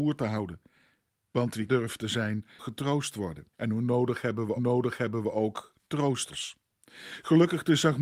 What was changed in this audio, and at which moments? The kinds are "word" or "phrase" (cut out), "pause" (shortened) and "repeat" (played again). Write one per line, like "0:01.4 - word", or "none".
0:01.7 - word
0:02.6 - word
0:03.5 - pause
0:04.6 - repeat